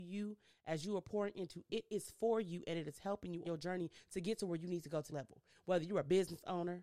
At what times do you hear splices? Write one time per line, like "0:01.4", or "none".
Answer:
0:03.4
0:05.1